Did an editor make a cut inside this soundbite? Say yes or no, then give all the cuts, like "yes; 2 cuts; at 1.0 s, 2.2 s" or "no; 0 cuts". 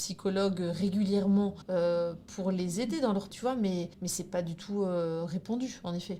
yes; 3 cuts; at 1.6 s, 3.3 s, 3.9 s